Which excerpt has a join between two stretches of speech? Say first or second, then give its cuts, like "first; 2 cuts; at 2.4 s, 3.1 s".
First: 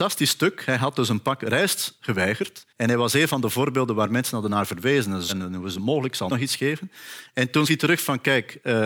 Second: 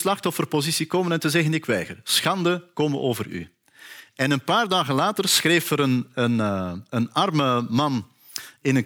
first; 4 cuts; at 2.7 s, 5.3 s, 6.3 s, 7.6 s